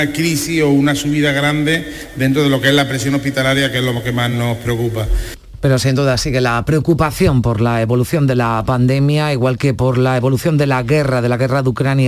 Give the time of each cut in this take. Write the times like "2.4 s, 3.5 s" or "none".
none